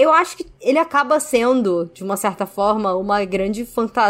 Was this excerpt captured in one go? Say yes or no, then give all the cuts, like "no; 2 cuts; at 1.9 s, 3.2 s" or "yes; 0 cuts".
yes; 0 cuts